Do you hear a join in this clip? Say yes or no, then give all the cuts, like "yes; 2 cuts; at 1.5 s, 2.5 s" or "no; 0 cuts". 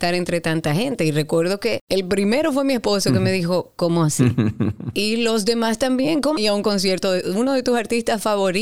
yes; 1 cut; at 6.4 s